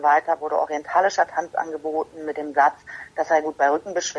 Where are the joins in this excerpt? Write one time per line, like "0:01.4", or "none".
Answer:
none

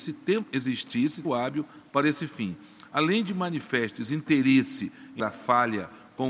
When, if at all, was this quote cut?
0:01.2
0:05.2

